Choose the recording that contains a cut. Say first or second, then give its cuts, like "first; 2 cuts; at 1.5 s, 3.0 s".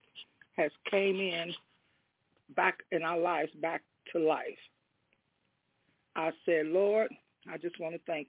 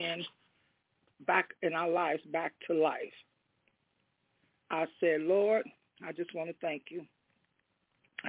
second; 1 cut; at 2.6 s